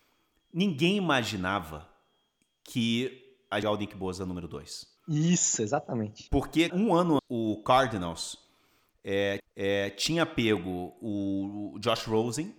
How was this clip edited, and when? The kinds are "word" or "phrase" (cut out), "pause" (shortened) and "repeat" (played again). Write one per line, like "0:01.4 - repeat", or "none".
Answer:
0:03.6 - phrase
0:05.0 - pause
0:06.7 - word
0:07.2 - word
0:09.4 - repeat